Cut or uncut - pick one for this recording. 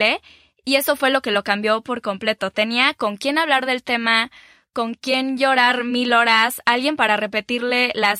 uncut